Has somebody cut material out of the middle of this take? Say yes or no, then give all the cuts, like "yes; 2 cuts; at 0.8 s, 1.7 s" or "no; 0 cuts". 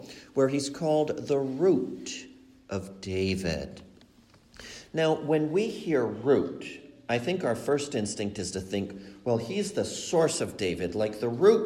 no; 0 cuts